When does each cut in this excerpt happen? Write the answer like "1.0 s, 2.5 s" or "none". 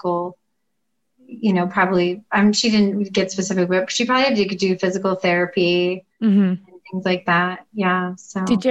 6.1 s